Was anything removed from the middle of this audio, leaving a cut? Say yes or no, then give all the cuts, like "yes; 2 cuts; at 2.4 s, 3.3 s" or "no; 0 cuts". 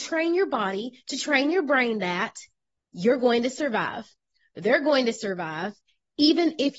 no; 0 cuts